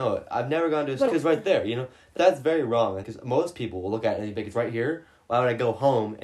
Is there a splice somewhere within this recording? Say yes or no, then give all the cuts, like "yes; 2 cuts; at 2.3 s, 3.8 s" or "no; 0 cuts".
yes; 3 cuts; at 1.1 s, 2.2 s, 3.0 s